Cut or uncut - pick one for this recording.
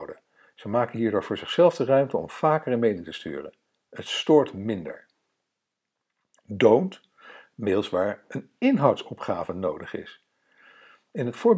uncut